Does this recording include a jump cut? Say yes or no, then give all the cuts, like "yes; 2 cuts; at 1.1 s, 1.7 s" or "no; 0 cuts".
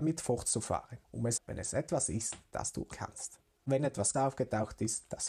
yes; 4 cuts; at 1.0 s, 1.4 s, 2.9 s, 4.1 s